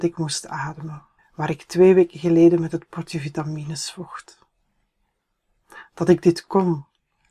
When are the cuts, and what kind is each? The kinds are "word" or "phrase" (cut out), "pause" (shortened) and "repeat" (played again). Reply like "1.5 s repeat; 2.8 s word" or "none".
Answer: 1.2 s pause